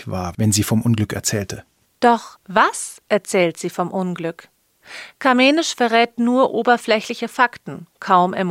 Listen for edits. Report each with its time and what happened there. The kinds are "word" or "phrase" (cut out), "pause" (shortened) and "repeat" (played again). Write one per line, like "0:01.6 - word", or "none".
none